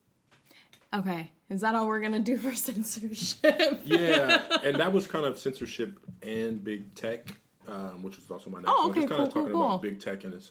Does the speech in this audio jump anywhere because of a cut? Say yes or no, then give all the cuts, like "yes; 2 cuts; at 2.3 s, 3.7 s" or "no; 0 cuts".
no; 0 cuts